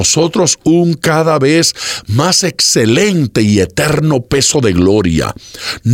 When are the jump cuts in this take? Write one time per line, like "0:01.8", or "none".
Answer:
none